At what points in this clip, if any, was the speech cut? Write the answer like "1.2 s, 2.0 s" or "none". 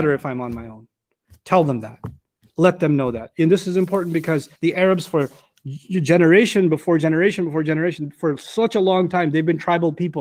4.6 s